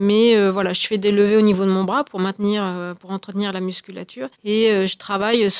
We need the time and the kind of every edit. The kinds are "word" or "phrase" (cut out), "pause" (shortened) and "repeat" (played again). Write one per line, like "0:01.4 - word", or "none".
0:04.3 - pause